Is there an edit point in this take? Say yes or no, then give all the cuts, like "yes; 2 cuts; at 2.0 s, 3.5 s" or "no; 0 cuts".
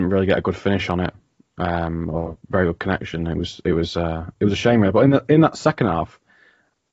no; 0 cuts